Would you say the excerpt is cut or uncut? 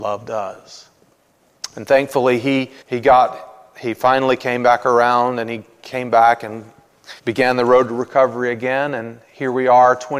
cut